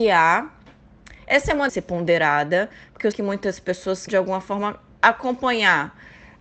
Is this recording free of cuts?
no; 3 cuts; at 1.7 s, 3.1 s, 4.1 s

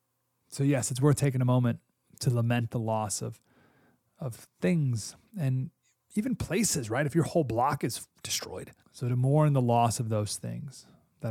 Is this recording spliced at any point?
yes; 1 cut; at 8.8 s

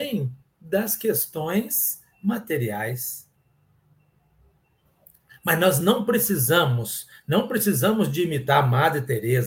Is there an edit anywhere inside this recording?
no; 0 cuts

